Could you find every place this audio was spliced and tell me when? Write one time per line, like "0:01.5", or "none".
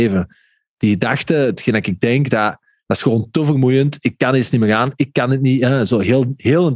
none